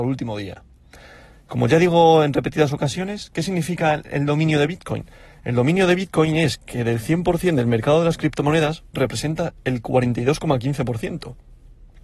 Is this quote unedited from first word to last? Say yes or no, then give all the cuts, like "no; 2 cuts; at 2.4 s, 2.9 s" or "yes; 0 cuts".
no; 1 cut; at 8.9 s